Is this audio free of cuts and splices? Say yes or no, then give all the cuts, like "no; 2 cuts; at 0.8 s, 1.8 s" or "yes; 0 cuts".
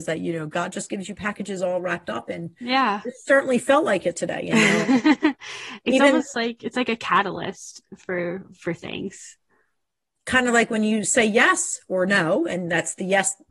yes; 0 cuts